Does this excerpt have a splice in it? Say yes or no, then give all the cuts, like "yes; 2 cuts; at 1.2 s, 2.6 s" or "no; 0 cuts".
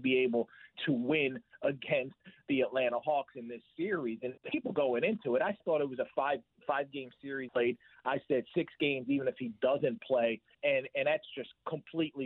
yes; 4 cuts; at 4.4 s, 5.6 s, 7.5 s, 10.5 s